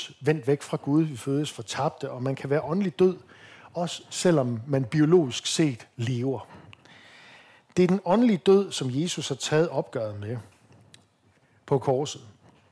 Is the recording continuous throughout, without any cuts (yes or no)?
yes